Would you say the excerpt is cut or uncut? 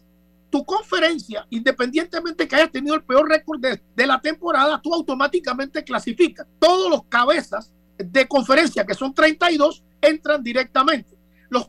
cut